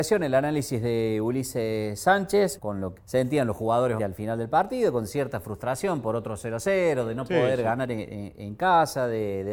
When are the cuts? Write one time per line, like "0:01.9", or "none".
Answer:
0:02.6
0:03.0
0:04.0